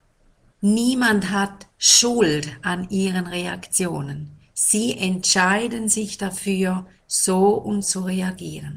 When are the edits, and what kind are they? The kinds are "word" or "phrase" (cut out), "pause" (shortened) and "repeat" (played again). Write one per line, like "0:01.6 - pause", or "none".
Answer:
0:01.7 - pause
0:07.8 - word